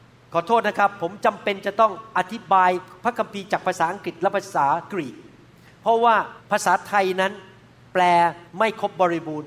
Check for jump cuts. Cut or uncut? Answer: cut